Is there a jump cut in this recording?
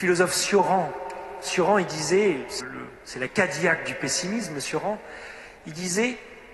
yes; 1 cut; at 2.6 s

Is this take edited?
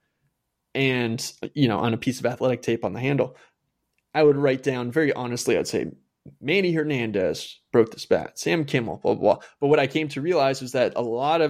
no; 0 cuts

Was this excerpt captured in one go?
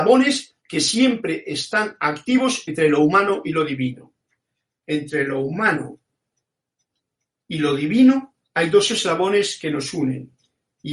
no; 1 cut; at 8.4 s

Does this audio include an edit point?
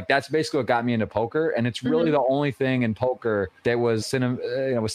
yes; 2 cuts; at 3.6 s, 4.0 s

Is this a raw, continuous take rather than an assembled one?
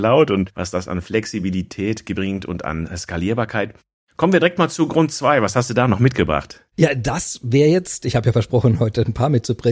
yes; 0 cuts

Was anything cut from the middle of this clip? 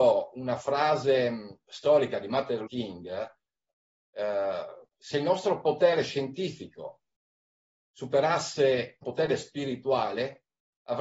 yes; 3 cuts; at 2.7 s, 4.9 s, 9.0 s

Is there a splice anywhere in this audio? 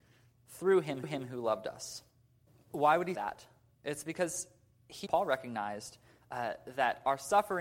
yes; 4 cuts; at 1.0 s, 2.5 s, 3.1 s, 5.1 s

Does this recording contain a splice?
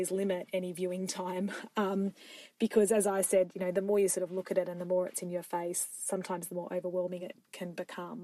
no; 0 cuts

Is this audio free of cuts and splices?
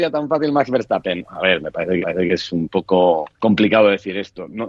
no; 2 cuts; at 2.0 s, 3.3 s

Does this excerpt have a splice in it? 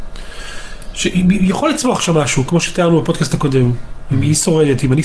no; 0 cuts

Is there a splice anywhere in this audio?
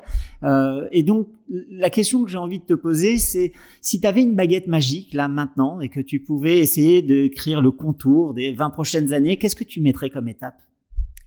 no; 0 cuts

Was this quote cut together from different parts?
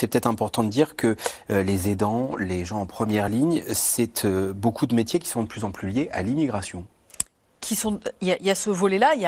no; 0 cuts

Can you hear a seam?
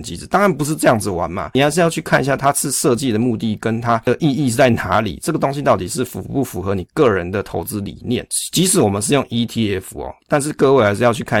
no; 0 cuts

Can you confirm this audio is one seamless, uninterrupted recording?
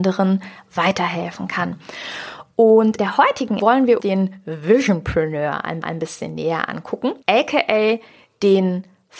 no; 5 cuts; at 3.0 s, 3.6 s, 4.0 s, 5.8 s, 7.2 s

